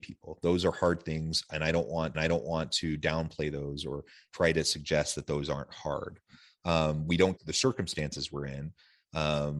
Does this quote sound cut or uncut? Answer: cut